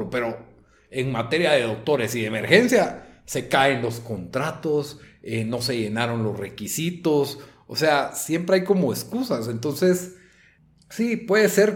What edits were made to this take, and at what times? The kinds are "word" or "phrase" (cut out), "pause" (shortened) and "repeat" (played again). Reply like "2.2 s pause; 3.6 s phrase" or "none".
none